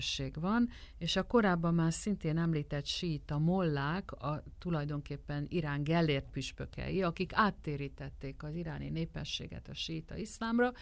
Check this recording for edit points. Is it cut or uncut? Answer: uncut